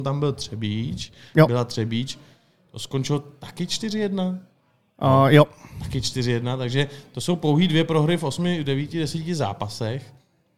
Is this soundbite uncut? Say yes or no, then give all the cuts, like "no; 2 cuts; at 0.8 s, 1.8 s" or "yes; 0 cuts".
yes; 0 cuts